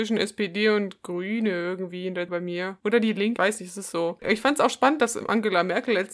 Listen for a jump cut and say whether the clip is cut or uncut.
cut